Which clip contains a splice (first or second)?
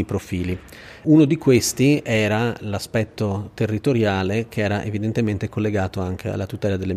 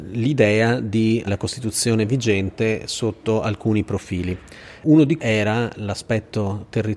second